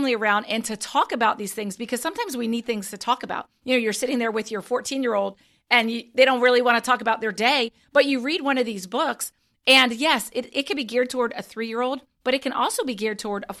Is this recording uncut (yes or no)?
yes